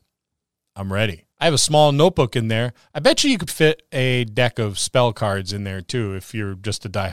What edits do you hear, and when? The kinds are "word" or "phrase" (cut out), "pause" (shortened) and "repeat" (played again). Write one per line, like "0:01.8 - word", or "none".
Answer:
0:01.3 - pause
0:03.5 - word